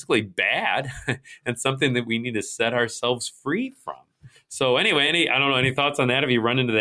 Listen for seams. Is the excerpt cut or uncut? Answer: uncut